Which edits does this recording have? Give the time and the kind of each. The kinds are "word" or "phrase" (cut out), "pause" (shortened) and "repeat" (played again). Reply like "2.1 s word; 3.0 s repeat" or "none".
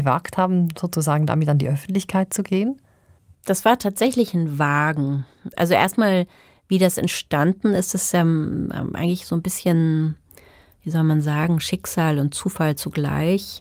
none